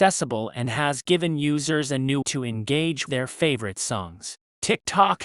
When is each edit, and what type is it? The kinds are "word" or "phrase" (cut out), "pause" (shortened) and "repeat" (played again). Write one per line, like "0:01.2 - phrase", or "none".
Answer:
0:02.2 - word
0:03.1 - word